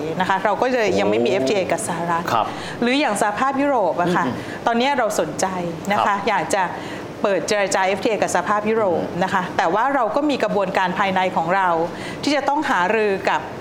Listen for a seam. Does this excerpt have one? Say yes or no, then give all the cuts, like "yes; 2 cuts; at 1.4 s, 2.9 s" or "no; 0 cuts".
no; 0 cuts